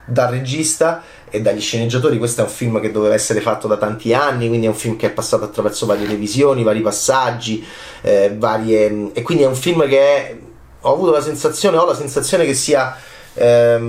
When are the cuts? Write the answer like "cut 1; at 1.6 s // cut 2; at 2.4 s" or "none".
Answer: none